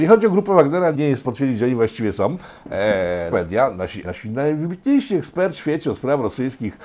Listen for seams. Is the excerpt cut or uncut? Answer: cut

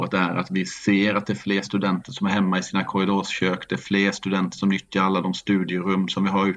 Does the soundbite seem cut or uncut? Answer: uncut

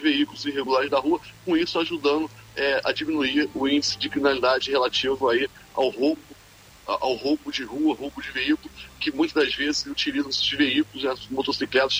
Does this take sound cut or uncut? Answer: uncut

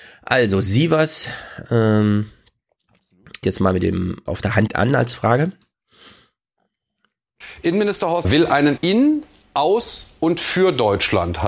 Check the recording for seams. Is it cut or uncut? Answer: cut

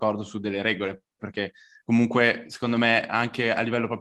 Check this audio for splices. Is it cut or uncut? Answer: uncut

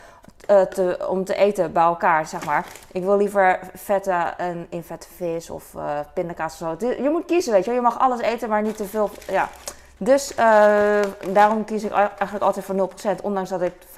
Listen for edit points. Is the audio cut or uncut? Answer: uncut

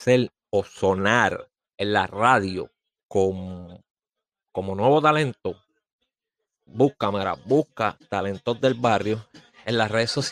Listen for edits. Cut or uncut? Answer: cut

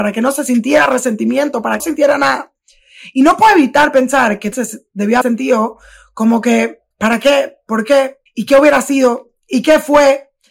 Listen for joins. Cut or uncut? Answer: cut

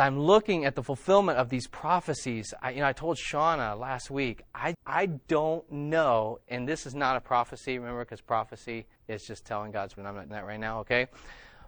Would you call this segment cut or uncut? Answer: cut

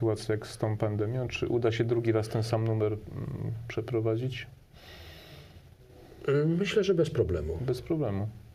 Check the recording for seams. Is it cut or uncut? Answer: uncut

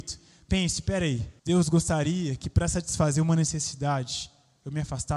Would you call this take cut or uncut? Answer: cut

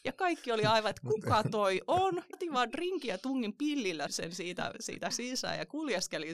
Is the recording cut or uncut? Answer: cut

